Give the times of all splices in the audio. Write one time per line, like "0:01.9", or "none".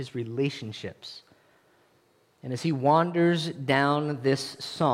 none